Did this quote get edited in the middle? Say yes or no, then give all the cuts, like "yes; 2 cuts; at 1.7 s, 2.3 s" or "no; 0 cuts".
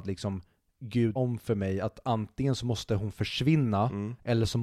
yes; 1 cut; at 1.2 s